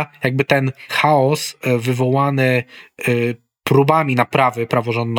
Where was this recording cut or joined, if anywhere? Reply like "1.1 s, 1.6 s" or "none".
none